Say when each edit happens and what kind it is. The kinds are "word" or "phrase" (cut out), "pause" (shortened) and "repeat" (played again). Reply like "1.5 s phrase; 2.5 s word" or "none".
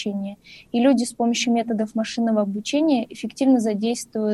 none